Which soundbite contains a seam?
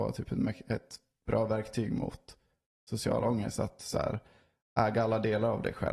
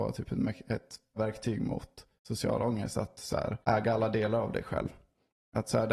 second; 3 cuts; at 1.2 s, 2.2 s, 3.6 s

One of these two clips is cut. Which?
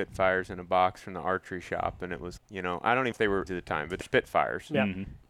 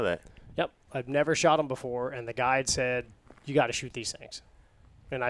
first; 4 cuts; at 2.4 s, 3.1 s, 3.5 s, 4.0 s

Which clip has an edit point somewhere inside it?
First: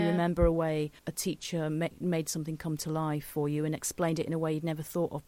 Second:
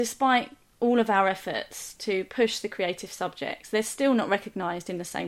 first; 1 cut; at 1.0 s

